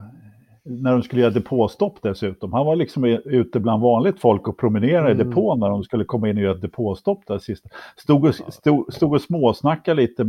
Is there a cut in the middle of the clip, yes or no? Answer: no